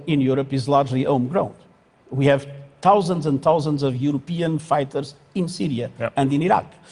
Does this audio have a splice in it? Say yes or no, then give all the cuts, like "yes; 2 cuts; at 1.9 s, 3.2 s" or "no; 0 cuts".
no; 0 cuts